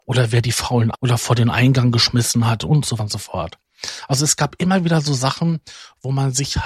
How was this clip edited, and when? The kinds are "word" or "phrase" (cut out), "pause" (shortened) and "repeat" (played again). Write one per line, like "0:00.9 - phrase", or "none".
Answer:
0:00.9 - phrase
0:03.0 - word